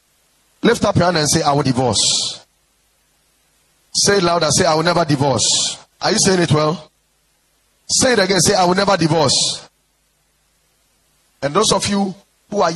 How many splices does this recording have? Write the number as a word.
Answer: two